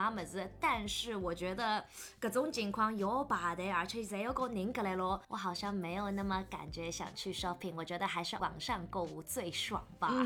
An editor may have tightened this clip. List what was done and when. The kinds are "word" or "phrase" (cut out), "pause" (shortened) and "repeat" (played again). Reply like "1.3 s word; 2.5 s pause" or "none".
5.2 s pause; 8.4 s phrase